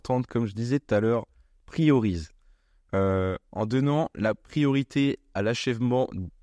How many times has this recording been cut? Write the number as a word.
zero